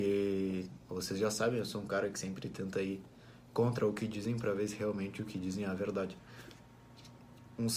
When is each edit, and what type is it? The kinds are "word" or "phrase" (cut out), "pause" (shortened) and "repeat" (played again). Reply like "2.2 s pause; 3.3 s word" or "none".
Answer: none